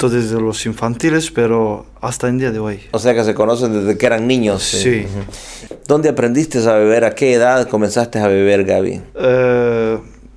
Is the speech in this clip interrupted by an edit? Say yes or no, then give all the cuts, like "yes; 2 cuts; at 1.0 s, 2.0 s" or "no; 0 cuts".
no; 0 cuts